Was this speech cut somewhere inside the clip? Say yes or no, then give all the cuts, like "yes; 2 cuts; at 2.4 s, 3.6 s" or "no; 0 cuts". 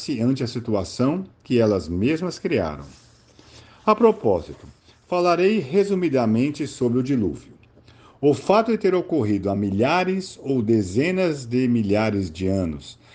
no; 0 cuts